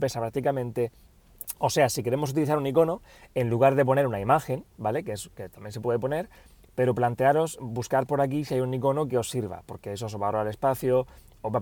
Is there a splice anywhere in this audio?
no; 0 cuts

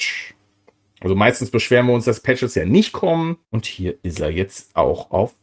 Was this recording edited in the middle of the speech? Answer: yes; 1 cut; at 3.4 s

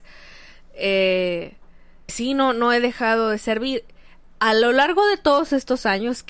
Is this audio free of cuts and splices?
no; 1 cut; at 2.1 s

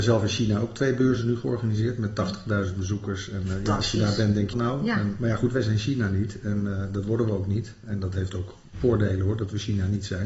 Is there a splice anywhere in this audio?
yes; 1 cut; at 4.5 s

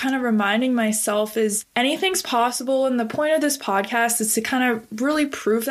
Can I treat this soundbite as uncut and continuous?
yes; 0 cuts

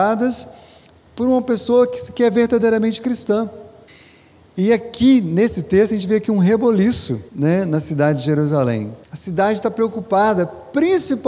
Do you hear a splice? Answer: yes; 3 cuts; at 3.9 s, 7.3 s, 9.0 s

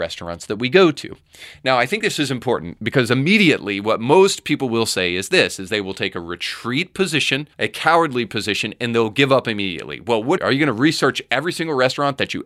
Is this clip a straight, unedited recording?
no; 2 cuts; at 7.5 s, 10.4 s

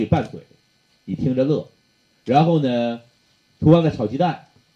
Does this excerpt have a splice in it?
no; 0 cuts

